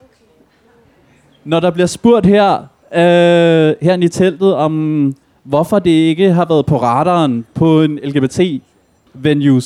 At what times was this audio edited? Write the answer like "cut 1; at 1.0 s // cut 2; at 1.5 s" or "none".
none